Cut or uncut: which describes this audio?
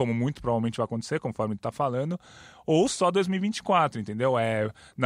cut